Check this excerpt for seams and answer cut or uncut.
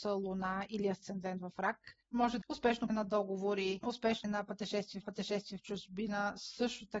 cut